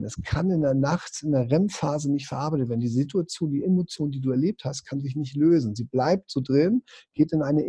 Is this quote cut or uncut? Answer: uncut